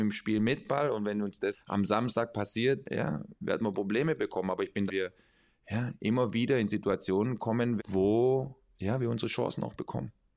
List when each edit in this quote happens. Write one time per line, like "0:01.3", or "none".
0:01.5
0:02.8
0:04.9
0:07.8